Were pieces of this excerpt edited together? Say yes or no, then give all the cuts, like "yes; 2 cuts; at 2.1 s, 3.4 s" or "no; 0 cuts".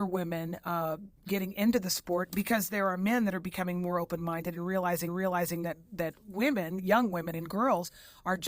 yes; 2 cuts; at 1.2 s, 5.1 s